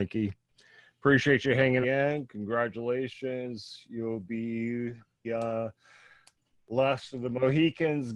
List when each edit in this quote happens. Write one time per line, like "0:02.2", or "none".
0:01.8
0:05.2